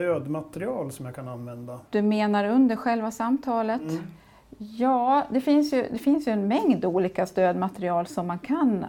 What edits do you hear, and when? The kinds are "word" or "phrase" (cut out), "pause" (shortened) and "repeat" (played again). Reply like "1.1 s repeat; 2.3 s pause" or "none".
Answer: 1.9 s pause